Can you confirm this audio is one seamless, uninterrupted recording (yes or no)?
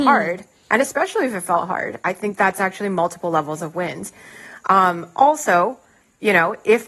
yes